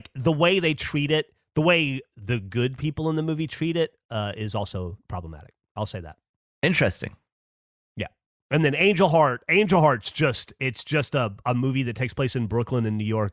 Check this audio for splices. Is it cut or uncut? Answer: uncut